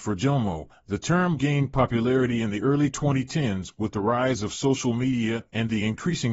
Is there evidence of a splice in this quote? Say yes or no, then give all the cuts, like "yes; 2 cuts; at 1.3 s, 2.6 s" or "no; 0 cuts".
no; 0 cuts